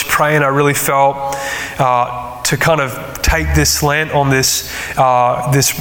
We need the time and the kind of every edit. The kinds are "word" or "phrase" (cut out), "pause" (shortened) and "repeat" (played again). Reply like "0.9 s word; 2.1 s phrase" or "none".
none